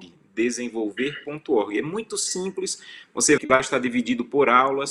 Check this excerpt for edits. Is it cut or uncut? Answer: cut